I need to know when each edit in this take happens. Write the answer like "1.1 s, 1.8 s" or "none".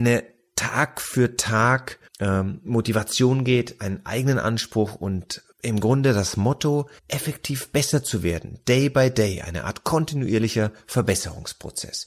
2.1 s, 5.5 s, 7.0 s